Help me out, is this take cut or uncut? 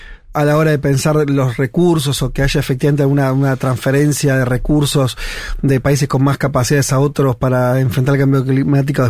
uncut